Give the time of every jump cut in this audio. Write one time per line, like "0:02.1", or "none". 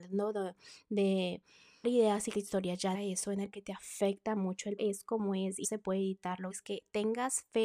0:01.8
0:02.3
0:02.9
0:03.5
0:04.8
0:05.6
0:06.5